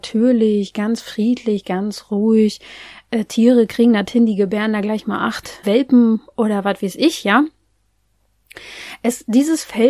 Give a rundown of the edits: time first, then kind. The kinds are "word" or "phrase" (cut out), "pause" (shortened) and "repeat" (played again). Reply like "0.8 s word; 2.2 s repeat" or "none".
5.6 s word